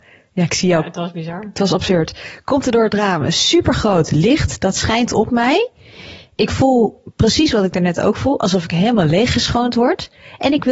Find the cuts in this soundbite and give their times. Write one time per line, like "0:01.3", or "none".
none

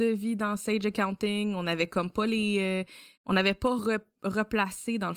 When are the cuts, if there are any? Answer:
none

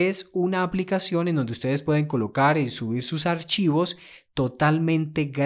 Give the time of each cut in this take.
none

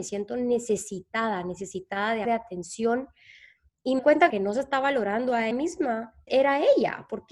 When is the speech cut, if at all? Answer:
0:02.2
0:04.0
0:04.3
0:05.5
0:06.3

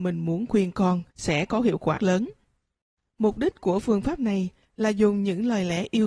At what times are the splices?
0:02.0

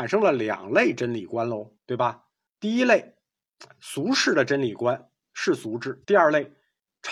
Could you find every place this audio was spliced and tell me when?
0:01.8
0:02.5
0:06.0

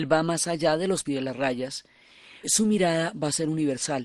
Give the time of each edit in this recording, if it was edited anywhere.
0:01.0
0:02.4

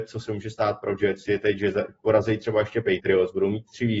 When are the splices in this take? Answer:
none

